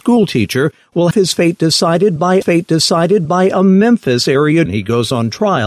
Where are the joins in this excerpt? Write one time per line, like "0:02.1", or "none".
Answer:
0:01.1
0:02.4
0:04.7